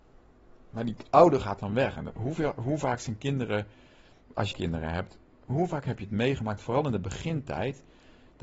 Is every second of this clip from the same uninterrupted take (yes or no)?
no